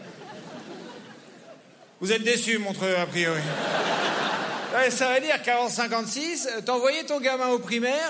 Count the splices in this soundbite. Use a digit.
0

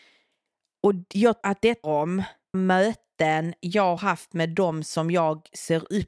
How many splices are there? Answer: 4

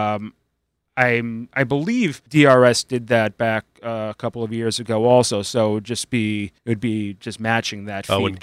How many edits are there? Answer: 2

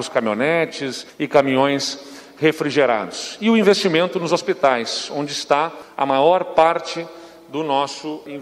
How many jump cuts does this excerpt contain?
0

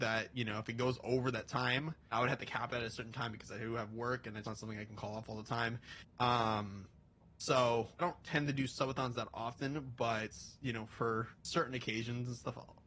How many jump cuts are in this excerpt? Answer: 5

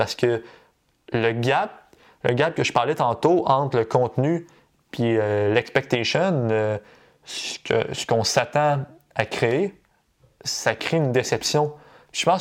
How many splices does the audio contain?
0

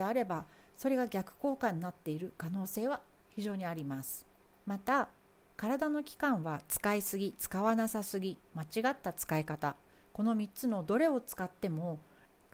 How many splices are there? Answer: 0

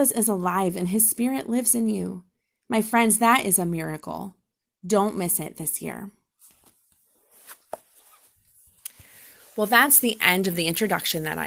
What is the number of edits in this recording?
0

